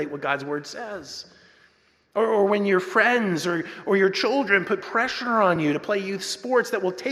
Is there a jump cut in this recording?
no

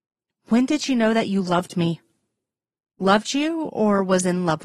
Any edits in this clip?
no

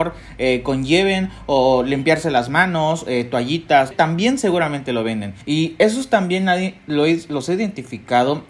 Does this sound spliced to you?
yes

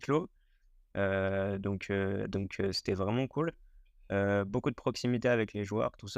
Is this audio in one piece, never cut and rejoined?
yes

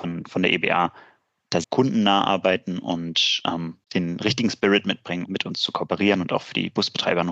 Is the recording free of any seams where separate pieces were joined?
no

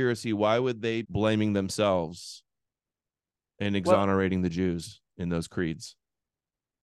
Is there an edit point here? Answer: yes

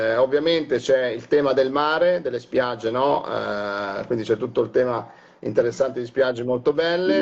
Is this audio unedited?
yes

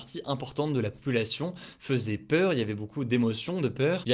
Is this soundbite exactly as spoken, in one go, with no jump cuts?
yes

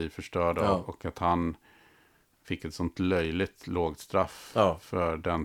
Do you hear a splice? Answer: no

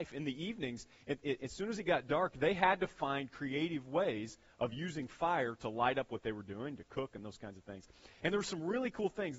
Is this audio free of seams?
yes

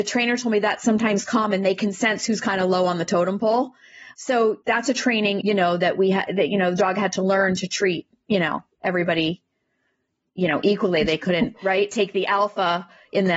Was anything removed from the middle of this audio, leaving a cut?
yes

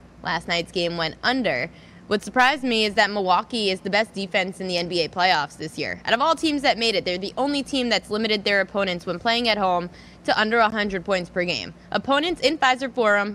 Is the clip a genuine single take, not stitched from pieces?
yes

